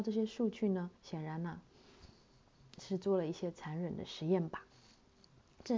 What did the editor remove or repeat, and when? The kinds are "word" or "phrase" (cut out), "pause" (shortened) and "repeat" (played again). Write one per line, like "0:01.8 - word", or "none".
0:01.0 - pause